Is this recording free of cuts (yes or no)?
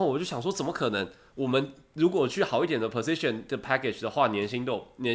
yes